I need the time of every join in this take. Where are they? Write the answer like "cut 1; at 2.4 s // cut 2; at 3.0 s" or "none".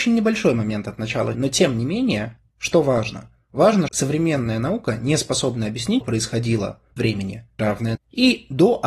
cut 1; at 1.3 s // cut 2; at 3.9 s // cut 3; at 6.0 s // cut 4; at 7.0 s // cut 5; at 7.6 s // cut 6; at 8.0 s

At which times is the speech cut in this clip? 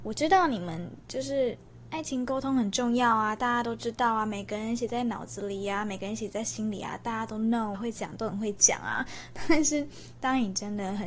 cut 1; at 7.7 s

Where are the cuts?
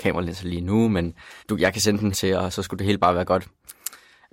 cut 1; at 1.4 s // cut 2; at 2.1 s // cut 3; at 2.5 s

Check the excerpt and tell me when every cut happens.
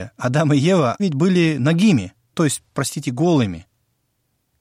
cut 1; at 1.0 s // cut 2; at 2.3 s

